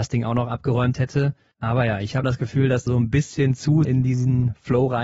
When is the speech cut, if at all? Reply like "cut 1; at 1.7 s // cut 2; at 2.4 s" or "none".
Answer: cut 1; at 2.2 s // cut 2; at 2.9 s // cut 3; at 3.8 s

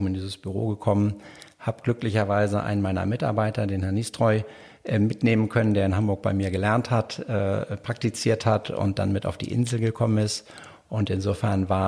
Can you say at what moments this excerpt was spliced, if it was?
none

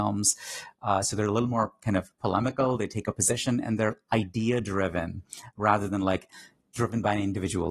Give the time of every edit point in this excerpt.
none

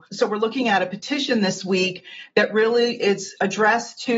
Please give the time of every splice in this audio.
none

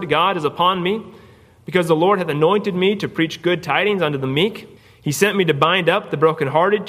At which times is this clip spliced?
cut 1; at 4.8 s

